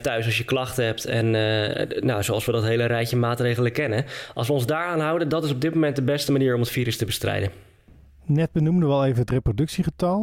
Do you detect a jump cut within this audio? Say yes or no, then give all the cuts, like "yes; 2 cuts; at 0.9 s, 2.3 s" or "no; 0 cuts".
no; 0 cuts